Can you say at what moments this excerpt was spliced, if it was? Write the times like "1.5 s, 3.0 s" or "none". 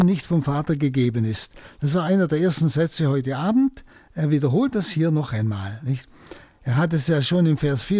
none